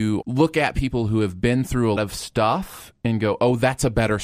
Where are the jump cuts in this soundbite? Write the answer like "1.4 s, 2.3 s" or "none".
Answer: 2.0 s

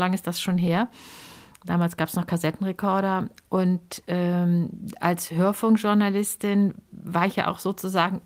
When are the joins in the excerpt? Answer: none

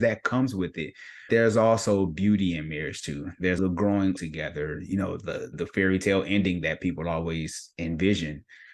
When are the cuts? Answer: 1.3 s, 3.6 s, 4.2 s, 5.5 s

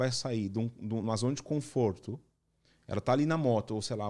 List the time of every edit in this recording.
none

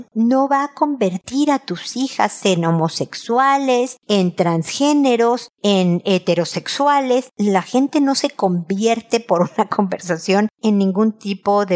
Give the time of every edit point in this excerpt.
none

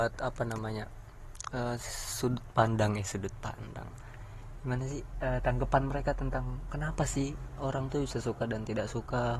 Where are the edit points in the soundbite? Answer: none

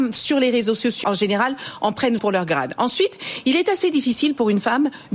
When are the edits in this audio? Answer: 1.0 s, 2.2 s

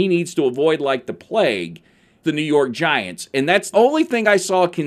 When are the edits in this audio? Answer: 2.2 s, 3.7 s

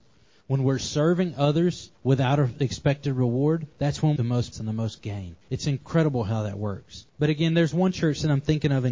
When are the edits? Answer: 1.9 s, 3.7 s, 4.2 s, 4.5 s, 5.4 s, 7.1 s

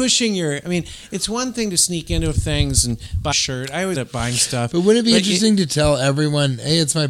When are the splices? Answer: 2.3 s, 3.3 s, 3.9 s

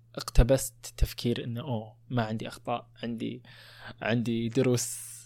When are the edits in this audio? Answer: none

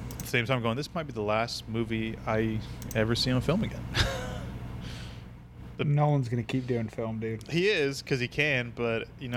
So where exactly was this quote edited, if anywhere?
none

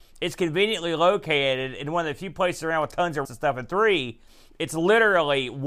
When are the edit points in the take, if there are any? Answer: 3.2 s

